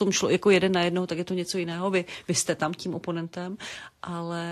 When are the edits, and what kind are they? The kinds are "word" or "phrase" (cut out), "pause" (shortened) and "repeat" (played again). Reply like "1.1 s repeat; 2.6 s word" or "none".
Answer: none